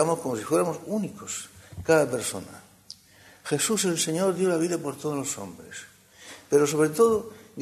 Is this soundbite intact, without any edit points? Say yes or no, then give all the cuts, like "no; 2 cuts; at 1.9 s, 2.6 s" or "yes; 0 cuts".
yes; 0 cuts